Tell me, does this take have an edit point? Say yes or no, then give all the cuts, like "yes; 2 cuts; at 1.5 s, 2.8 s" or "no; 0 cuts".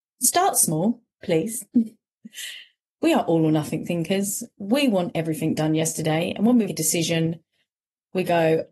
yes; 1 cut; at 6.7 s